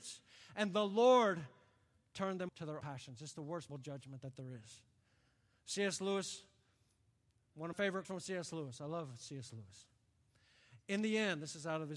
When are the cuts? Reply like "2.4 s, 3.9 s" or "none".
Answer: 2.5 s, 2.8 s, 3.7 s, 7.7 s, 8.0 s

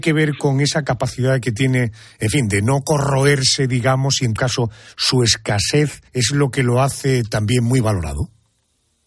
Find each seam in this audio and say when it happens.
4.4 s, 6.1 s

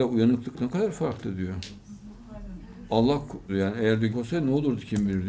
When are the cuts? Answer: 3.5 s, 4.1 s

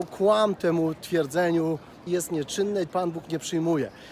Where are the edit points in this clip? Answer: 2.1 s, 2.9 s

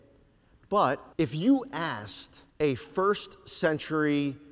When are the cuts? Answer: 1.1 s, 2.5 s

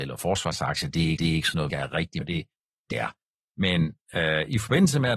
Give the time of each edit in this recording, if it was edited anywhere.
1.2 s, 1.7 s, 2.2 s, 2.9 s

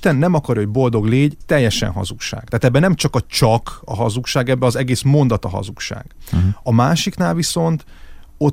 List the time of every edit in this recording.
1.4 s

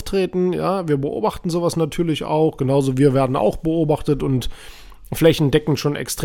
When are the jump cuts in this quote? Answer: none

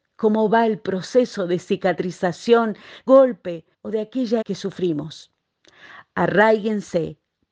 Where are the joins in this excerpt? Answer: 3.1 s, 3.7 s, 4.4 s

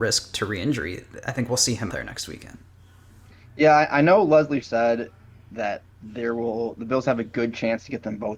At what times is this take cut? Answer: 1.9 s, 4.6 s, 5.9 s

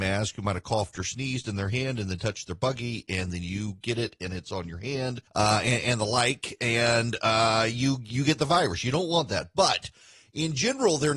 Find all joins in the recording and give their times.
5.3 s

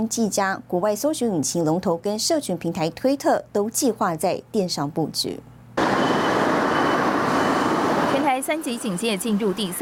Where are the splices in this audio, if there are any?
2.0 s

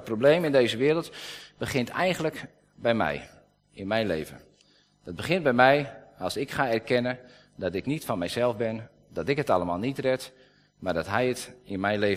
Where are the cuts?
none

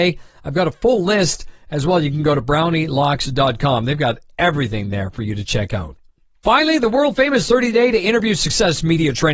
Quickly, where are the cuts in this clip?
none

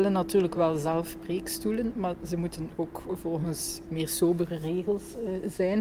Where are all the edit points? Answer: 3.9 s

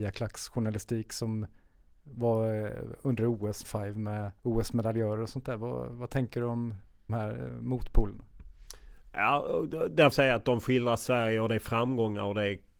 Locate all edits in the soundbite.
3.6 s, 4.4 s, 7.1 s, 10.1 s

